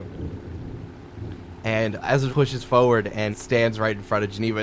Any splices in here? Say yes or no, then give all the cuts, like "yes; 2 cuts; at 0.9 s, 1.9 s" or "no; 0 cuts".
yes; 2 cuts; at 2.3 s, 3.3 s